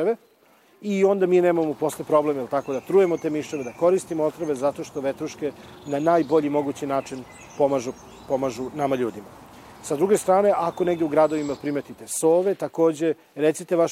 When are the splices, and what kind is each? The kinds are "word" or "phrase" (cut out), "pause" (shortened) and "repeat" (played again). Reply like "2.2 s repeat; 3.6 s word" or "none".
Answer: none